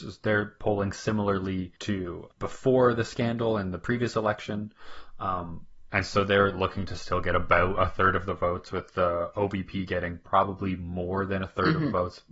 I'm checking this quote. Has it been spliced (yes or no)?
yes